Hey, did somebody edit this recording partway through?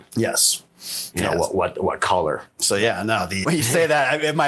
yes; 1 cut; at 3.4 s

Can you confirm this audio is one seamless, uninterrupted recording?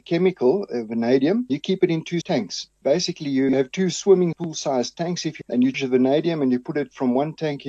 no; 4 cuts; at 1.5 s, 2.2 s, 5.4 s, 5.7 s

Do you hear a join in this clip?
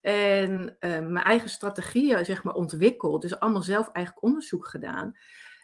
no; 0 cuts

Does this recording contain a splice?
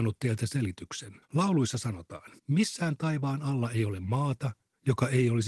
yes; 2 cuts; at 1.2 s, 2.4 s

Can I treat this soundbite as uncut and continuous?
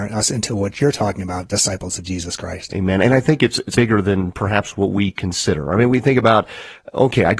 no; 1 cut; at 3.7 s

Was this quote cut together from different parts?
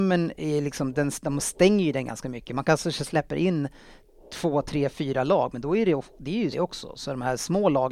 yes; 1 cut; at 6.5 s

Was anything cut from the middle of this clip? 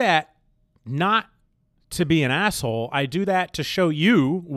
no; 0 cuts

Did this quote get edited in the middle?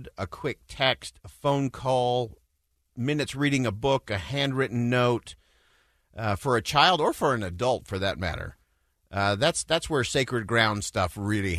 no; 0 cuts

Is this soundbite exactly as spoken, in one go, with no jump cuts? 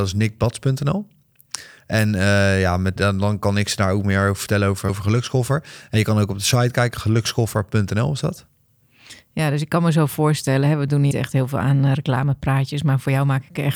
no; 3 cuts; at 3.0 s, 4.9 s, 11.1 s

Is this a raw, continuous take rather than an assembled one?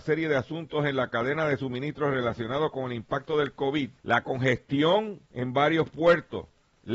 no; 2 cuts; at 4.0 s, 5.3 s

